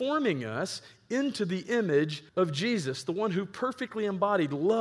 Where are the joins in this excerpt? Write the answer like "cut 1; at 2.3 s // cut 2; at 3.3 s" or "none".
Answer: cut 1; at 2.3 s